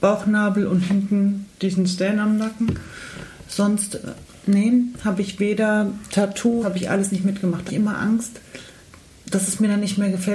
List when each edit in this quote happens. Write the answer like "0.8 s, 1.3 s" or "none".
1.5 s, 6.6 s, 7.7 s, 8.8 s